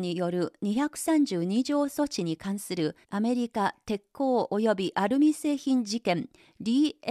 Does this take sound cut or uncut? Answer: cut